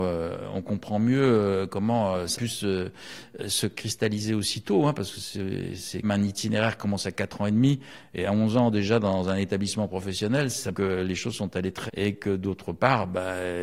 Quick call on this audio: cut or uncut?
cut